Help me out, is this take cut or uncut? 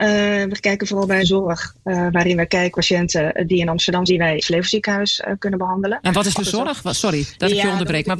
cut